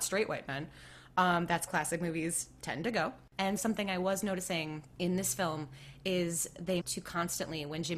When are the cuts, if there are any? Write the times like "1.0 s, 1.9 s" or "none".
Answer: 1.7 s, 3.6 s, 6.8 s